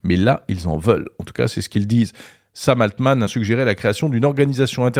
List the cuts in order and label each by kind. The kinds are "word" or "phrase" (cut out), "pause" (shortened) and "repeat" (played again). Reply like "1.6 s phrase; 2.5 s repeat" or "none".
3.3 s word